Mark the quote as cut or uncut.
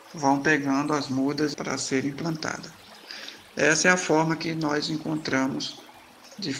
cut